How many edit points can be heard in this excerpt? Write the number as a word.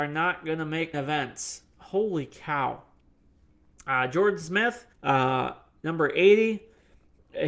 three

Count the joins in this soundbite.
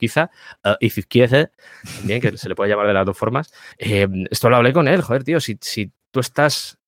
one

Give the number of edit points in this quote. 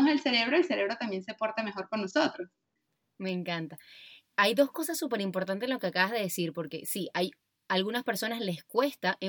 zero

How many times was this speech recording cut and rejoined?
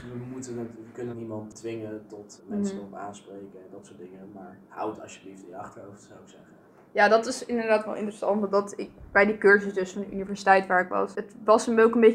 three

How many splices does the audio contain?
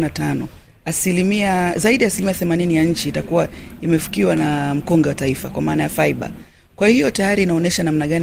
zero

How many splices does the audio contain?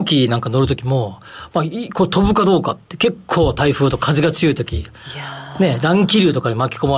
one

